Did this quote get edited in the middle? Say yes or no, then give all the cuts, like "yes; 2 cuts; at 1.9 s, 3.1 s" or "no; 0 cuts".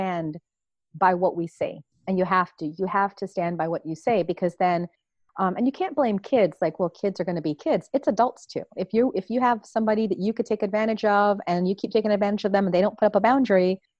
no; 0 cuts